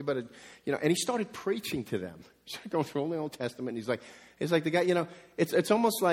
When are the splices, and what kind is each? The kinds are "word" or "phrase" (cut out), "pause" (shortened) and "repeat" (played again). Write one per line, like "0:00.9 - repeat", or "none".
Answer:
none